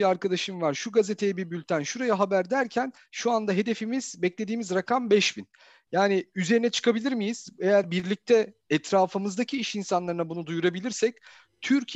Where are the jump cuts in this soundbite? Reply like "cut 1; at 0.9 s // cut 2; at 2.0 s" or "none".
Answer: none